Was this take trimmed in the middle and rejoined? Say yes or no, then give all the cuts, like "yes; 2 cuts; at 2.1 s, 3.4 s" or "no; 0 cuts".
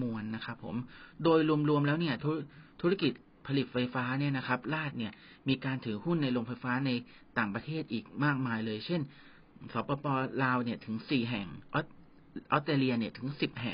no; 0 cuts